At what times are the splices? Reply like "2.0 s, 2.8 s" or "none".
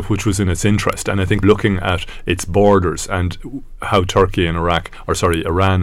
1.4 s